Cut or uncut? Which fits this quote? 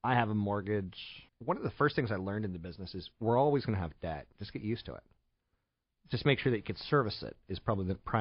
cut